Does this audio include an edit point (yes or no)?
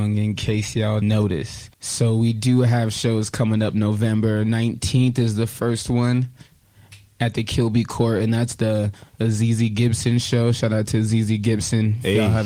yes